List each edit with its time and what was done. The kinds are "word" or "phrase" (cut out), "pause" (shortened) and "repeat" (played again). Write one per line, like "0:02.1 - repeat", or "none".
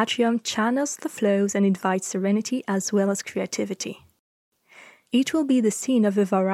none